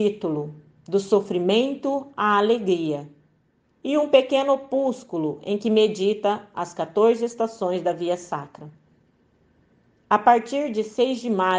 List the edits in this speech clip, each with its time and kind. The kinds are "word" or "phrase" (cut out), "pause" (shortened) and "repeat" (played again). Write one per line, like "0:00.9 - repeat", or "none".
none